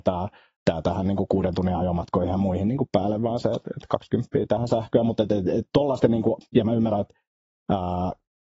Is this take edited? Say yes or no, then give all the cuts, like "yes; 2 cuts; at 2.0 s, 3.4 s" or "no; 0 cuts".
no; 0 cuts